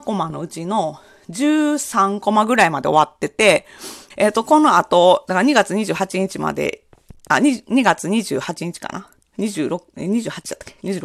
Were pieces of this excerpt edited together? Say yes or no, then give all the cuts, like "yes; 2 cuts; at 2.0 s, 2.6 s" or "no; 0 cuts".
yes; 1 cut; at 4.1 s